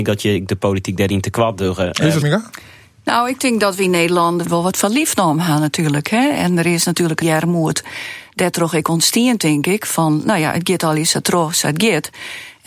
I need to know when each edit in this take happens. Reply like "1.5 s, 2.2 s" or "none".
2.2 s, 4.4 s, 7.2 s